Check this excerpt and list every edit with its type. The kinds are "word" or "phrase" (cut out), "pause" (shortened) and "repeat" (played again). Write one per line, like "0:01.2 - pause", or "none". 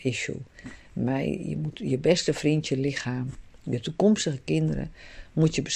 none